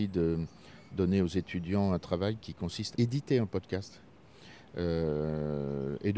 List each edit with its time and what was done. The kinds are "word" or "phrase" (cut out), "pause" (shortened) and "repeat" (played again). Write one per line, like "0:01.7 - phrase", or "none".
0:02.9 - word